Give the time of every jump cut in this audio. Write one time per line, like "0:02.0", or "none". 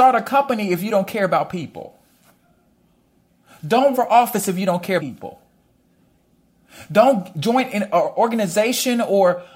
0:03.9
0:05.0